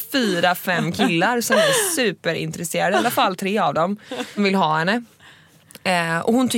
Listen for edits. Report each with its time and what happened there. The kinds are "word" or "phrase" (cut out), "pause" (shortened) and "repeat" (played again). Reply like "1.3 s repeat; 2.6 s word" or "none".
4.4 s word